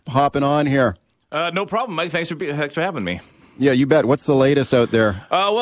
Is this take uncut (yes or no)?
yes